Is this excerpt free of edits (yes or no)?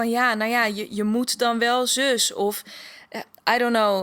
yes